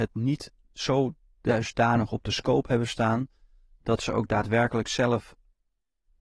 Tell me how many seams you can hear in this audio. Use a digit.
0